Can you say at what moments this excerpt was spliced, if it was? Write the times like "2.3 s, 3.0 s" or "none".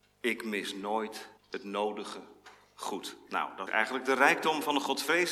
1.4 s, 3.7 s